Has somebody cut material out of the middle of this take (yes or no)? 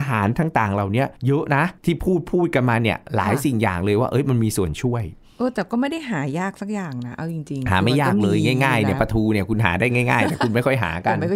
yes